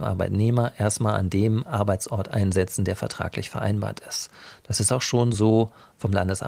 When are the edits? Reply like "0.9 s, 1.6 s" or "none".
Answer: none